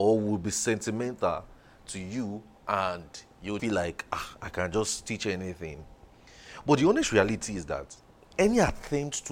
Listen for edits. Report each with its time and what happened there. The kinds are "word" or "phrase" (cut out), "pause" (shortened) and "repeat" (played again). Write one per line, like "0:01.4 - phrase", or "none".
0:03.6 - word